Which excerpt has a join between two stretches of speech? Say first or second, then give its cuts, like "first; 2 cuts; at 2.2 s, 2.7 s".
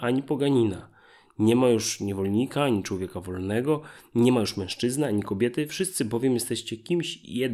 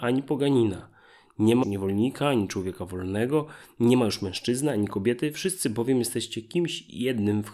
second; 1 cut; at 1.6 s